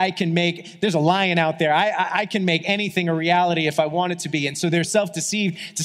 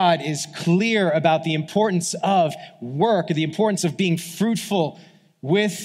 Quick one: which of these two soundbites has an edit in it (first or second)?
first